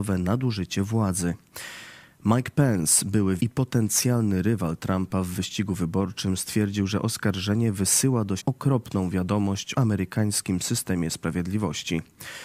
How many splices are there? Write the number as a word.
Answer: three